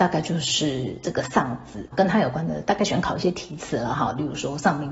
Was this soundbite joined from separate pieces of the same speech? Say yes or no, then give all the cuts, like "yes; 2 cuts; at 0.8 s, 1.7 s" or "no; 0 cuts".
yes; 1 cut; at 1.9 s